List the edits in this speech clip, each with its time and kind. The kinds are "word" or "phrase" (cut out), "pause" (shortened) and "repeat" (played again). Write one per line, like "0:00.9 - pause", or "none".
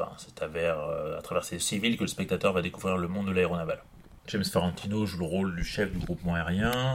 0:01.6 - phrase
0:04.2 - pause

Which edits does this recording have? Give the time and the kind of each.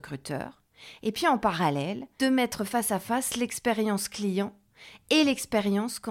0:02.2 - word

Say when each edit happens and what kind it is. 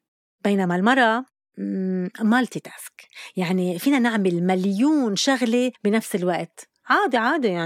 0:05.8 - pause

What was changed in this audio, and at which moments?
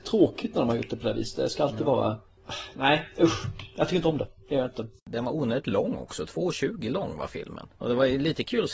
0:07.7 - pause

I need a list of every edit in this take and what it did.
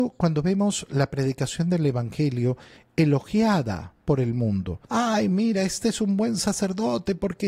0:04.0 - pause
0:04.8 - pause

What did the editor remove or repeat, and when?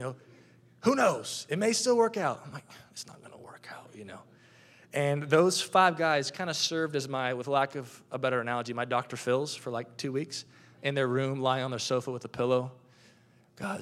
none

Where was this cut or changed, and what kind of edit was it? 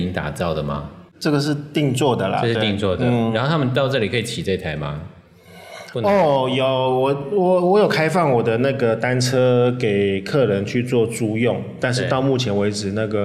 0:01.1 - pause

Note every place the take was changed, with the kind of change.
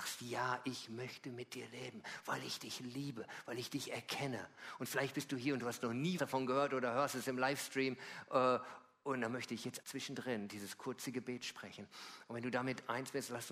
0:06.2 - word
0:09.8 - word

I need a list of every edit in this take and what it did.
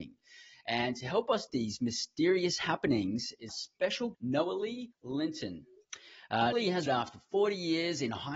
0:01.5 - word
0:03.5 - word
0:04.1 - word
0:04.9 - pause
0:06.5 - word
0:06.9 - word

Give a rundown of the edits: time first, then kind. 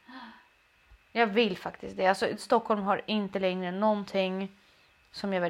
none

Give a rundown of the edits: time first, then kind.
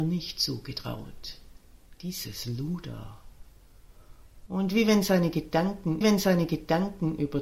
0:06.0 - repeat

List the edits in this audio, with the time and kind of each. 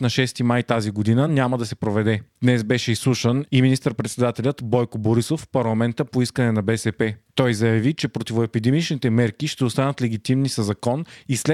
none

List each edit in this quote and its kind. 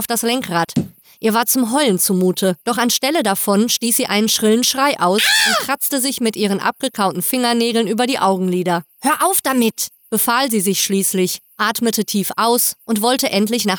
0:02.6 - pause
0:08.9 - pause

